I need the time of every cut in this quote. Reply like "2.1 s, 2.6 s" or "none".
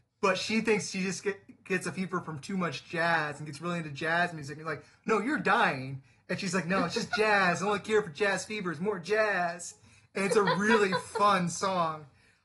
none